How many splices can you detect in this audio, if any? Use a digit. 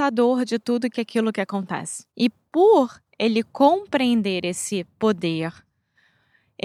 1